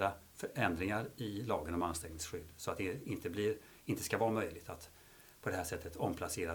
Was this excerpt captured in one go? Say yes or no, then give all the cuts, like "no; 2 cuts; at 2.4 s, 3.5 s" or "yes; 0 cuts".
yes; 0 cuts